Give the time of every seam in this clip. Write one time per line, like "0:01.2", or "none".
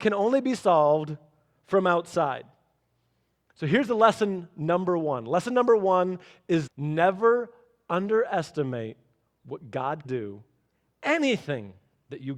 0:06.7
0:10.0
0:10.9